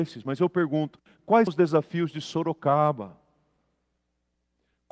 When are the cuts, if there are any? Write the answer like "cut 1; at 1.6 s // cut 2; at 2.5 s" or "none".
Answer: cut 1; at 1.5 s